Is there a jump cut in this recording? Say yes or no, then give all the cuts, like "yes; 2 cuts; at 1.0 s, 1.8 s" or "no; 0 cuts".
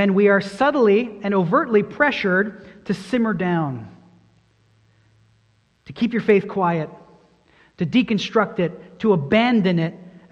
no; 0 cuts